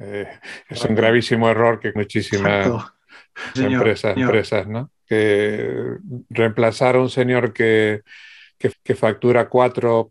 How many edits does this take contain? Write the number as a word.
four